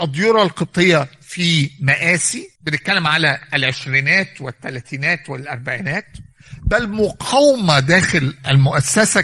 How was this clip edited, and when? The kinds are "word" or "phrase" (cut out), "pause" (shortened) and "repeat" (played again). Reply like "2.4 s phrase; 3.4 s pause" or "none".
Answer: 2.6 s pause